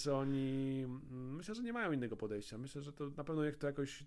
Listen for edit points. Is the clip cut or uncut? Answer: uncut